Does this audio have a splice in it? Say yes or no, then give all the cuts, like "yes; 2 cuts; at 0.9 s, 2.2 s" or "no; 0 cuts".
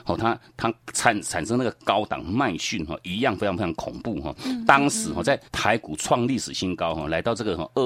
yes; 1 cut; at 5.5 s